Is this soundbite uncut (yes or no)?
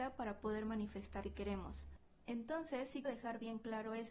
no